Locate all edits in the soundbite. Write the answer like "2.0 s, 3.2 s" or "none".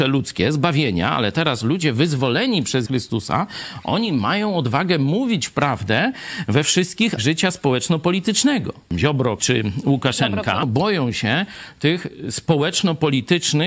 2.8 s, 7.2 s, 9.4 s